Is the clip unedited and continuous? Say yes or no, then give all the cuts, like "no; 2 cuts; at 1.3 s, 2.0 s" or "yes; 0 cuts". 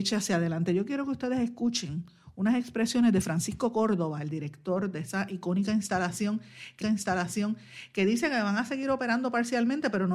no; 1 cut; at 6.8 s